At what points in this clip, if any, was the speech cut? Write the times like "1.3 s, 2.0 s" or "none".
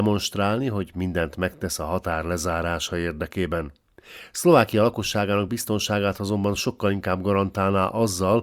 none